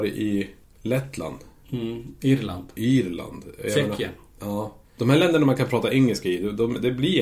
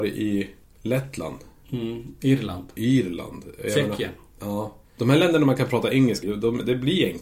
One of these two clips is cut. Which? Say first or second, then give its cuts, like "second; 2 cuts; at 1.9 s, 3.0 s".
second; 1 cut; at 6.2 s